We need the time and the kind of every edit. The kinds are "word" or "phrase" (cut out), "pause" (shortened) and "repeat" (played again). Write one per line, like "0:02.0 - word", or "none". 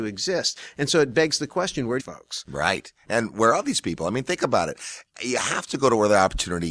0:02.0 - phrase